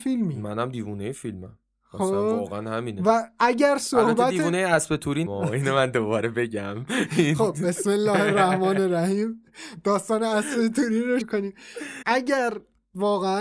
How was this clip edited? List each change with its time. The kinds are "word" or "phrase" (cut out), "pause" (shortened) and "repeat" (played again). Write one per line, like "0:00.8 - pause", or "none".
0:05.3 - word
0:11.2 - word
0:12.0 - word